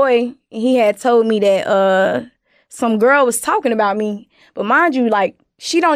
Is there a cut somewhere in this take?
no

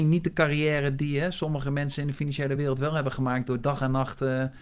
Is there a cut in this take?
no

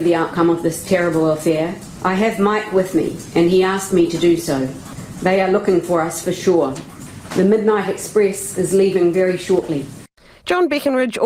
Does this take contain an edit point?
no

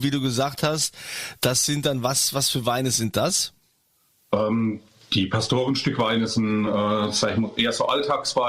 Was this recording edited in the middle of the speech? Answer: no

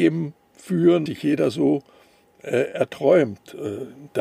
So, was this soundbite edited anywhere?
yes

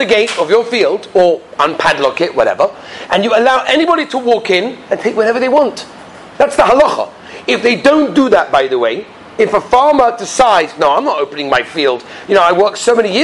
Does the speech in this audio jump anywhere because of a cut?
no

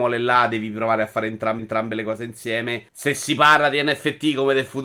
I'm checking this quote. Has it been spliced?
yes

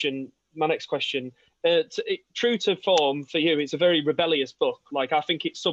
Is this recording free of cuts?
yes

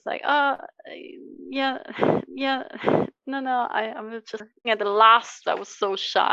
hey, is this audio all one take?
no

